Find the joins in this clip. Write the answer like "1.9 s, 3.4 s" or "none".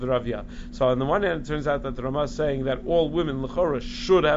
none